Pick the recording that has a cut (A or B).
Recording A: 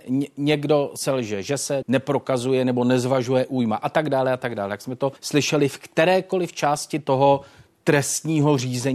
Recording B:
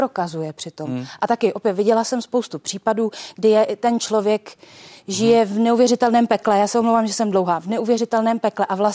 A